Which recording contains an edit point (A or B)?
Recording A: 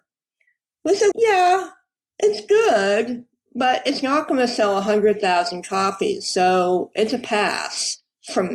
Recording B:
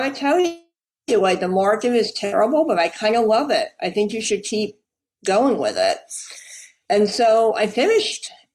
A